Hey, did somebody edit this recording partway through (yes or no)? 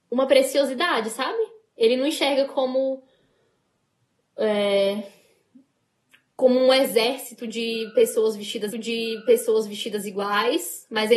yes